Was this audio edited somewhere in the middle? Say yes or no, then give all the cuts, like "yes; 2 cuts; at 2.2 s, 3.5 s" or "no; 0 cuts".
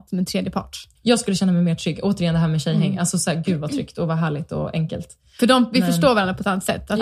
no; 0 cuts